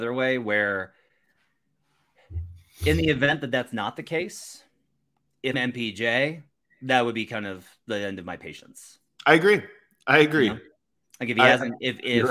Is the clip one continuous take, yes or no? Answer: no